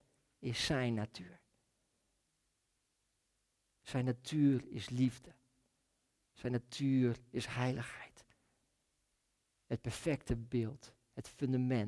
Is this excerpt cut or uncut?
uncut